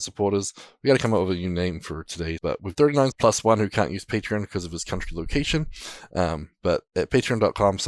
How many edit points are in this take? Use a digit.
3